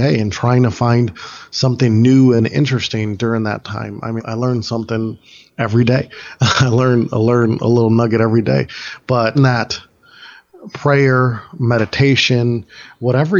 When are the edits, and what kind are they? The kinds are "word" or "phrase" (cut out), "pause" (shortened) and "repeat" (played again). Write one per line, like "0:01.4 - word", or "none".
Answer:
0:04.2 - word
0:09.3 - word